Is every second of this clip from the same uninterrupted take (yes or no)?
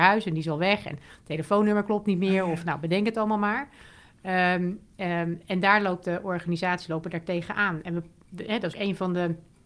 no